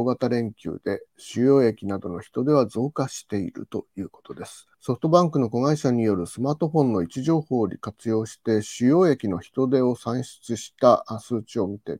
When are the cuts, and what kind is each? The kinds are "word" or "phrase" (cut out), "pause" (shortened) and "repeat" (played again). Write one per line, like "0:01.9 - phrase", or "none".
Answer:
0:04.7 - pause